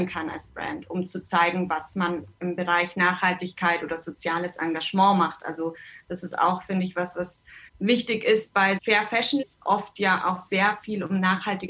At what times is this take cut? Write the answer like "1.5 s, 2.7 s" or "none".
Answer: 7.7 s, 8.8 s, 9.4 s